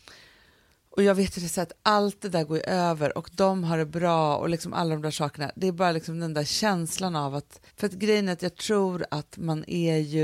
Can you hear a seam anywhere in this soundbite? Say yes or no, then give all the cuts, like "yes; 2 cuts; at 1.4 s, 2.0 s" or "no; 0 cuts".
yes; 1 cut; at 7.7 s